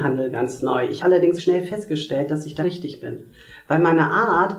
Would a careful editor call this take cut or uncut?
cut